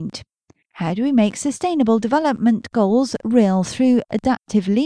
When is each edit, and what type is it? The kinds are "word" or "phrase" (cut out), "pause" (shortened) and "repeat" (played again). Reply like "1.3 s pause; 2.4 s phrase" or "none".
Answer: none